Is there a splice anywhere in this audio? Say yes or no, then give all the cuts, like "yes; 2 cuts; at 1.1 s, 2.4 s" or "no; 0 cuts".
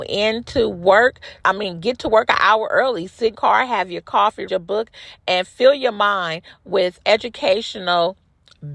yes; 4 cuts; at 1.4 s, 3.3 s, 4.5 s, 7.0 s